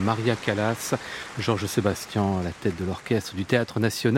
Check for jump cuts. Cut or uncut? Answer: uncut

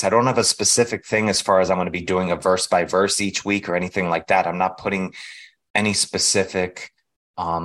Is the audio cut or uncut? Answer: uncut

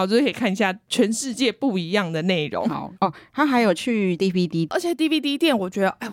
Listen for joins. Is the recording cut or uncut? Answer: cut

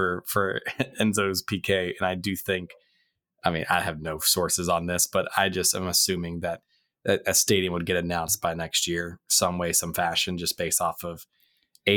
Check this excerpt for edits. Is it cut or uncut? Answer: uncut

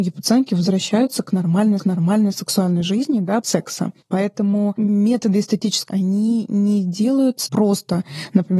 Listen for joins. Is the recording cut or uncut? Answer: cut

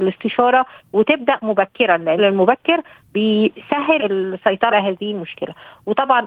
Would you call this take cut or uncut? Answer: cut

